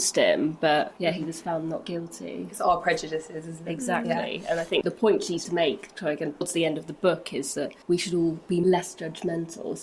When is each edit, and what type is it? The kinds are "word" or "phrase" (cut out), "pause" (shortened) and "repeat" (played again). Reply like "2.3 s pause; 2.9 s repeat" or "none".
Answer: 5.4 s word; 6.4 s word; 7.8 s pause